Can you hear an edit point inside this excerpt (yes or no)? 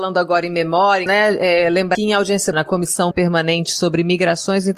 yes